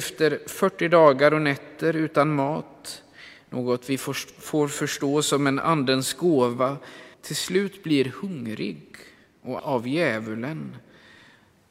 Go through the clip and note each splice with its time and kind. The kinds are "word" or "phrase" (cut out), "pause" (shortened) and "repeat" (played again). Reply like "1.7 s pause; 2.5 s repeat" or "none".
7.1 s pause; 9.6 s word